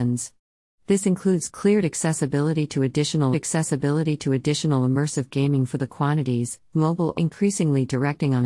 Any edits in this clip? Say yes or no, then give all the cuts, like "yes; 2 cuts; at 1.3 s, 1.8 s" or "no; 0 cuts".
yes; 3 cuts; at 3.3 s, 6.7 s, 7.1 s